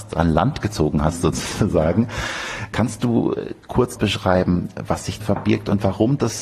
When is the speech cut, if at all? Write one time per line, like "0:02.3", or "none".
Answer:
0:04.0
0:05.2